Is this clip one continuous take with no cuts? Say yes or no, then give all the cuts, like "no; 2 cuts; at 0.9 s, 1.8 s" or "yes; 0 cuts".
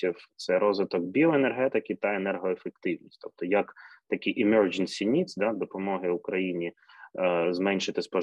yes; 0 cuts